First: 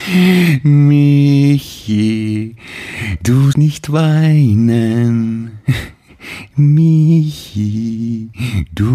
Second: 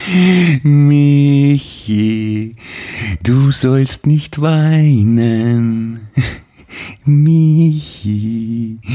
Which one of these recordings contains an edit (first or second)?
first